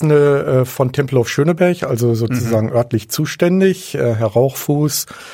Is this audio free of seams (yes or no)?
yes